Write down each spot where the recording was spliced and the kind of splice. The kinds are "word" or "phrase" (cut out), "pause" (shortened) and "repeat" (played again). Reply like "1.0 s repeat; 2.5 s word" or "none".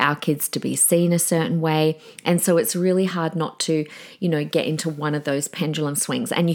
none